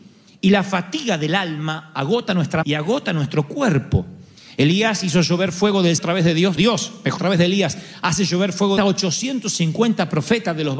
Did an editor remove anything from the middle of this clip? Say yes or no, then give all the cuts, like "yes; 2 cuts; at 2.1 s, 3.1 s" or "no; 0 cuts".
yes; 5 cuts; at 2.6 s, 6.0 s, 6.6 s, 7.2 s, 8.8 s